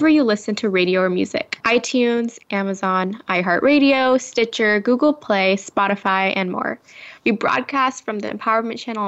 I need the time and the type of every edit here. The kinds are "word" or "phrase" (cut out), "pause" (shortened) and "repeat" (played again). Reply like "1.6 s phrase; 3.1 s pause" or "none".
1.6 s pause